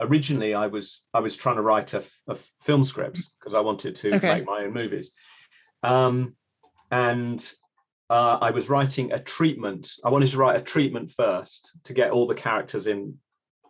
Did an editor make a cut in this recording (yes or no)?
no